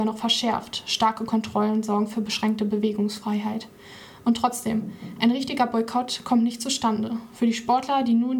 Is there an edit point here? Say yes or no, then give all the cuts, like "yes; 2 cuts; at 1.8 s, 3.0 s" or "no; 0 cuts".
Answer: no; 0 cuts